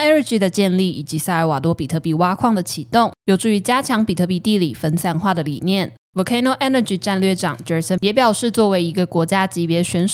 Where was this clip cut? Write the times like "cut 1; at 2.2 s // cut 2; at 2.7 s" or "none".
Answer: cut 1; at 8.0 s

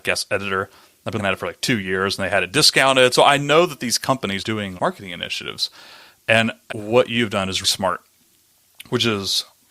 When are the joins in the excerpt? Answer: cut 1; at 1.2 s // cut 2; at 4.4 s // cut 3; at 4.8 s // cut 4; at 6.7 s // cut 5; at 7.6 s

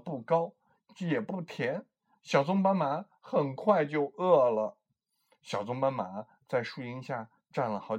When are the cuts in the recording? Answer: none

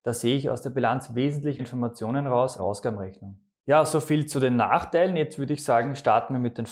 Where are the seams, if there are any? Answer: cut 1; at 1.6 s // cut 2; at 2.6 s

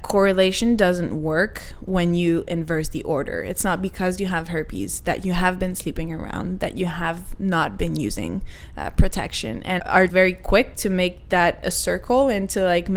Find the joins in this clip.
cut 1; at 9.8 s // cut 2; at 10.1 s

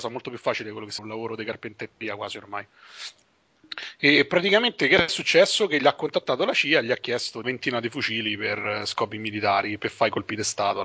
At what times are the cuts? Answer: cut 1; at 1.0 s // cut 2; at 7.4 s

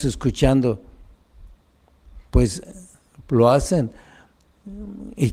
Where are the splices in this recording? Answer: none

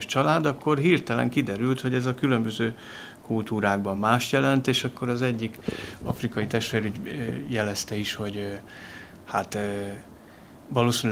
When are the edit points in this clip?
none

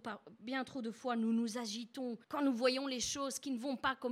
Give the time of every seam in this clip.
cut 1; at 2.2 s

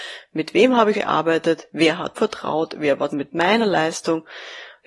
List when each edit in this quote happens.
cut 1; at 0.9 s // cut 2; at 2.1 s // cut 3; at 3.1 s

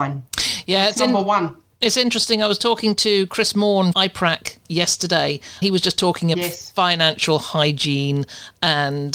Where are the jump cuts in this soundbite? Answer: cut 1; at 3.9 s // cut 2; at 5.6 s // cut 3; at 6.3 s

